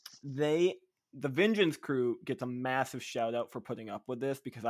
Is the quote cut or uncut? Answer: uncut